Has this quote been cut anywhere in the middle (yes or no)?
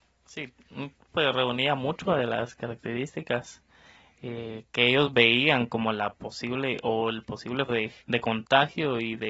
yes